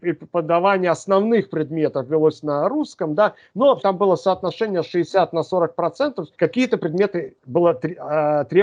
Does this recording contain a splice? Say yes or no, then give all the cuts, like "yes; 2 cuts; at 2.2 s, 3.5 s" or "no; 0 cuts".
yes; 2 cuts; at 3.8 s, 6.3 s